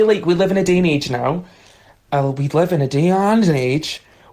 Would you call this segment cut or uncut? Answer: uncut